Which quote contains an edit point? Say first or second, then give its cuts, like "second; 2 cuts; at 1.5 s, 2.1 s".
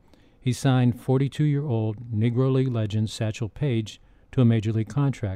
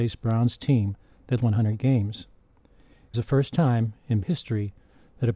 second; 3 cuts; at 1.4 s, 3.1 s, 4.2 s